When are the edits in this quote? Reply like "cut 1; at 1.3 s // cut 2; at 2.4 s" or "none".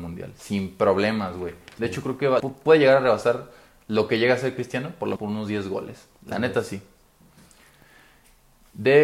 cut 1; at 2.4 s // cut 2; at 5.2 s